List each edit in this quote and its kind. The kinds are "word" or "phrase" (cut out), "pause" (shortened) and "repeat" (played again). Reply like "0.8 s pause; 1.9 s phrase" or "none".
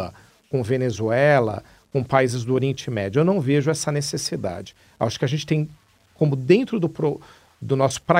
none